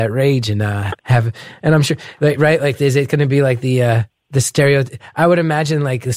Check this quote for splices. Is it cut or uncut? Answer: cut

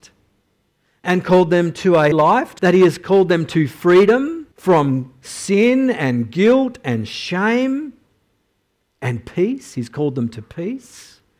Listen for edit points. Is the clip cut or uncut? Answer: cut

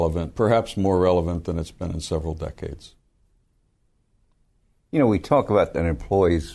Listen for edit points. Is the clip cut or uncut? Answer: uncut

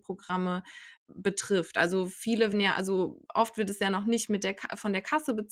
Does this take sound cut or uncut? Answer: cut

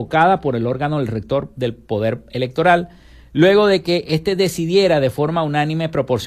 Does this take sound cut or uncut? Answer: uncut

